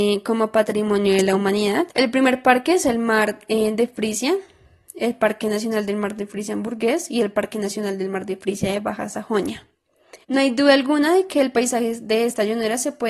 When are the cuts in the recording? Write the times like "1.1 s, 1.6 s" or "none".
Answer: 1.9 s, 10.2 s